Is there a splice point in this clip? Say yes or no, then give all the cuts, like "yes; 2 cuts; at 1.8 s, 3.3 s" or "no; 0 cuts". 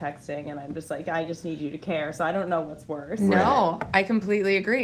no; 0 cuts